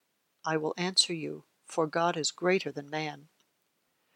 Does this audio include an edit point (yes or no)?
no